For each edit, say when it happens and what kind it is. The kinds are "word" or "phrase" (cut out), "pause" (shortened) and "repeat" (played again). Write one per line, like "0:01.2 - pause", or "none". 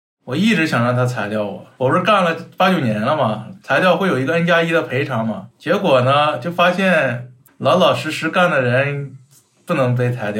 0:05.5 - pause
0:07.5 - pause